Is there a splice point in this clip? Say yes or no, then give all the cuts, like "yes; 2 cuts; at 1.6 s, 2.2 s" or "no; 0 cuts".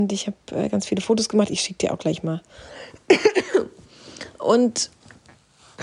no; 0 cuts